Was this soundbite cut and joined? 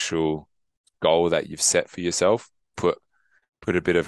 yes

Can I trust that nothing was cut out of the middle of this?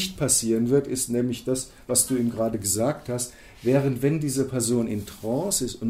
yes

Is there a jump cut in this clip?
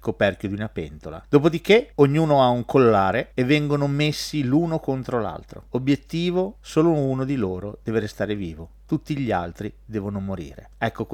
no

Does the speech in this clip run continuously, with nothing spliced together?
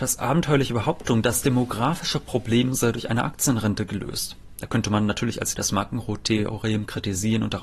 no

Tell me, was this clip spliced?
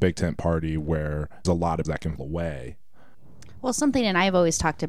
yes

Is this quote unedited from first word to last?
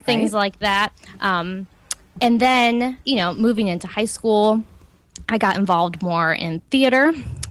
no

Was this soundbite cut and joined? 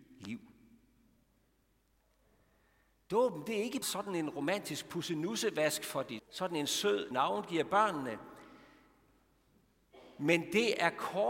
yes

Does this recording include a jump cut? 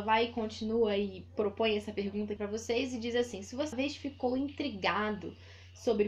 yes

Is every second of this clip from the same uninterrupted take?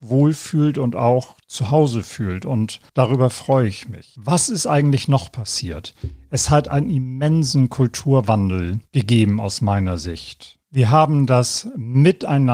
no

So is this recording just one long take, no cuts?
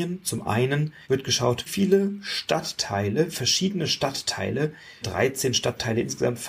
no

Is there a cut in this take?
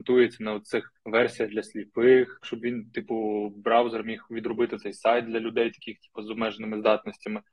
yes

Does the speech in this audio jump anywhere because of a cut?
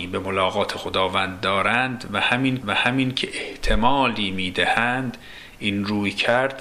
yes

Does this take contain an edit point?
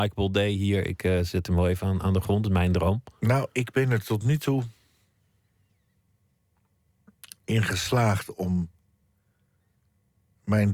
no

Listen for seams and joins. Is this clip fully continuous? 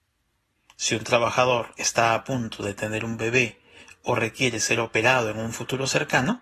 yes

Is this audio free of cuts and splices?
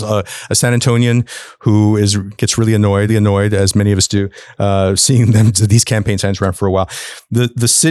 no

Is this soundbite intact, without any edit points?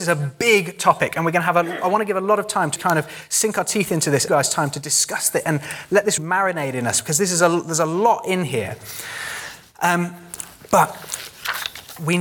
no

